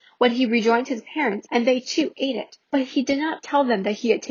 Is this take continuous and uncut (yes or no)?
no